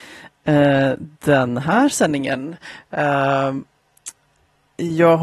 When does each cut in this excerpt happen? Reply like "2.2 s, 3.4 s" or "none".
none